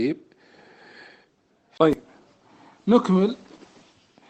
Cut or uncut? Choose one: uncut